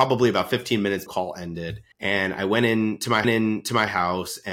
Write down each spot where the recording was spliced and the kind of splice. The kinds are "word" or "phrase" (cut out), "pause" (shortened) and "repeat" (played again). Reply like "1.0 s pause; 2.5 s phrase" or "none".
1.1 s phrase; 1.9 s pause; 3.2 s repeat